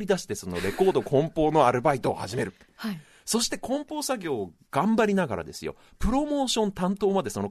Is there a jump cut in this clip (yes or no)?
no